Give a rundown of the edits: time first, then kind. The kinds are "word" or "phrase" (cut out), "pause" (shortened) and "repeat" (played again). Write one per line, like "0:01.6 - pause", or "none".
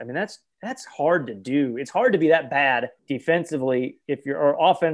0:03.0 - pause